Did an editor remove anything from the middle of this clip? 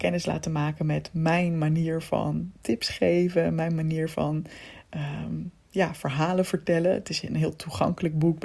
no; 0 cuts

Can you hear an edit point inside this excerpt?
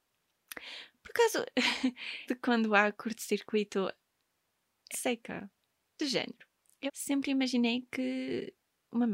yes; 3 cuts; at 2.3 s, 4.9 s, 6.9 s

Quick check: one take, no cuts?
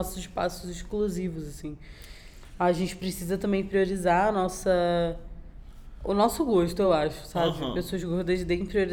yes; 0 cuts

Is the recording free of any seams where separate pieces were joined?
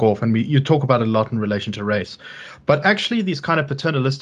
yes; 0 cuts

